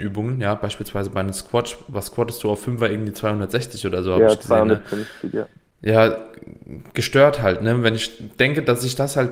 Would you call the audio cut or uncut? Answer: uncut